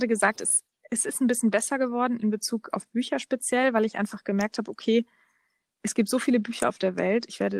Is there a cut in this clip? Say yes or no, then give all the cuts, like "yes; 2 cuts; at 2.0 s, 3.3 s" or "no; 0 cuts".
no; 0 cuts